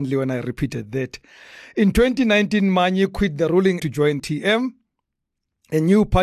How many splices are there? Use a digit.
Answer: 2